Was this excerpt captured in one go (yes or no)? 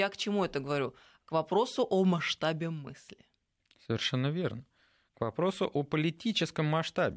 yes